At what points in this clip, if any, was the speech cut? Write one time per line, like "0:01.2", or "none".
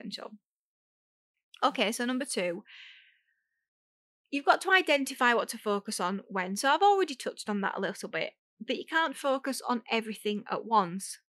none